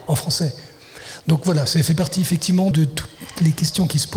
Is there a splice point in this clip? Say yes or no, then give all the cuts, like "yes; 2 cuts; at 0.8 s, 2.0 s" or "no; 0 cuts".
yes; 1 cut; at 2.7 s